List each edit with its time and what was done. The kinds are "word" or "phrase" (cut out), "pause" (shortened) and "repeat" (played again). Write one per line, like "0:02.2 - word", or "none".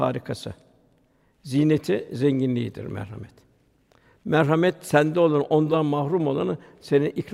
none